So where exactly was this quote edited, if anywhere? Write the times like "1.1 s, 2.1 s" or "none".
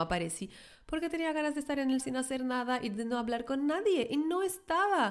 2.0 s